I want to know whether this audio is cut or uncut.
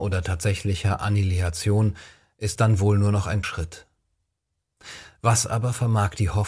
cut